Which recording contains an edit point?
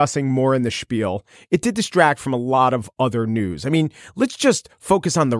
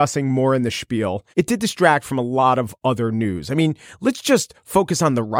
second; 1 cut; at 1.3 s

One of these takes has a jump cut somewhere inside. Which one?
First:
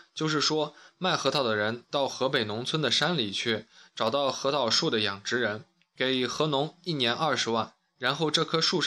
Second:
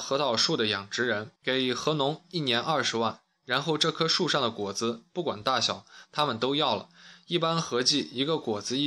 second; 1 cut; at 1.4 s

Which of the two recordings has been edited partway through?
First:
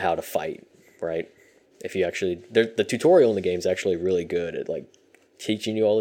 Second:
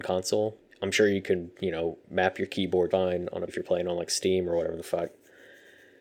second; 2 cuts; at 2.9 s, 3.5 s

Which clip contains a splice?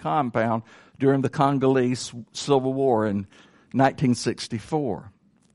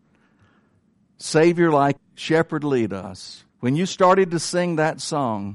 second; 2 cuts; at 2.0 s, 3.5 s

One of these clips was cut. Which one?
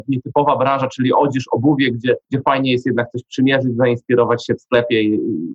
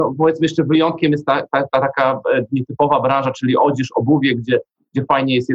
first; 1 cut; at 2.2 s

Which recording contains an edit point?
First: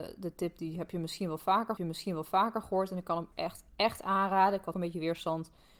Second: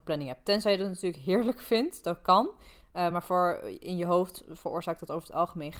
first; 3 cuts; at 1.8 s, 3.3 s, 4.7 s

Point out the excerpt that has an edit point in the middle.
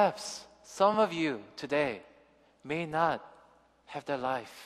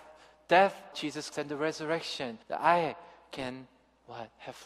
second; 3 cuts; at 0.9 s, 1.3 s, 2.4 s

